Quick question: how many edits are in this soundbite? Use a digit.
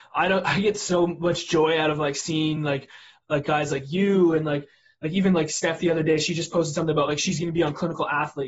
0